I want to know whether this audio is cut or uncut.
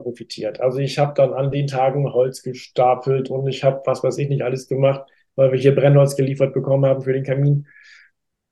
uncut